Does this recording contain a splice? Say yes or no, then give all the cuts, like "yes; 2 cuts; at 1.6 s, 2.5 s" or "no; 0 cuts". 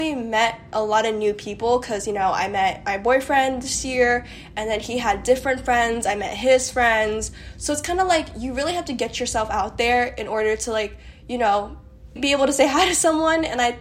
yes; 1 cut; at 12.2 s